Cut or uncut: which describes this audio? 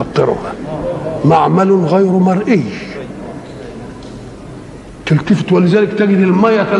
uncut